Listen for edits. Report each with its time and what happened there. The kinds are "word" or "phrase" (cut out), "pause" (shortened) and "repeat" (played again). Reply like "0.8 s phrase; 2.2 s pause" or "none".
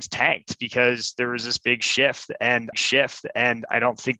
2.7 s repeat